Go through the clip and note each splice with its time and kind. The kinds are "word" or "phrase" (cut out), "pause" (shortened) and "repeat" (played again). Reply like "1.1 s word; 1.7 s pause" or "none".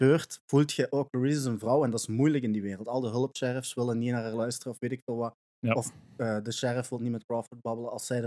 none